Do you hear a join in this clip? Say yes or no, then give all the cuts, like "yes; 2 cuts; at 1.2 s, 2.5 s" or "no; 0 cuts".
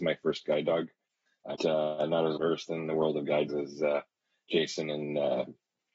yes; 3 cuts; at 1.6 s, 2.4 s, 3.5 s